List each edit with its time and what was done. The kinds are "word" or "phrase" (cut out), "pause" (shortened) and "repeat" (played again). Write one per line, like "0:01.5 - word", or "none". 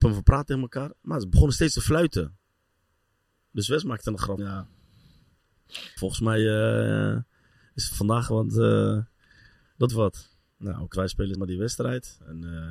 0:04.4 - word
0:06.0 - word
0:07.9 - word
0:09.9 - word
0:10.9 - word
0:11.3 - word